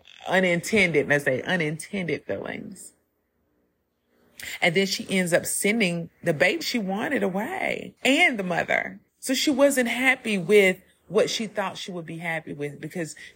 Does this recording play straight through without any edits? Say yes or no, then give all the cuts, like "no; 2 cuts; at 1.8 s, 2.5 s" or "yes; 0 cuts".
no; 4 cuts; at 1.2 s, 6.6 s, 8.0 s, 9.1 s